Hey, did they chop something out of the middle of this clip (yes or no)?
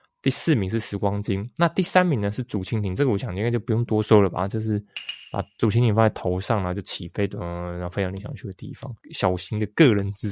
yes